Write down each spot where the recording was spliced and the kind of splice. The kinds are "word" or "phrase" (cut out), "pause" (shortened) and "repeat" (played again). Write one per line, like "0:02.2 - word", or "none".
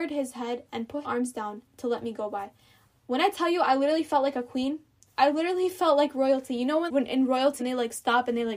0:01.0 - word
0:01.7 - pause
0:05.0 - pause
0:06.9 - word
0:07.6 - word